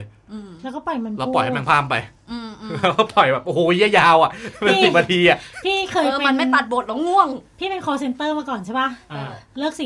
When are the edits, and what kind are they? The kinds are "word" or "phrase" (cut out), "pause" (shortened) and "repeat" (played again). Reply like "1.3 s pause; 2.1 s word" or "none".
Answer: none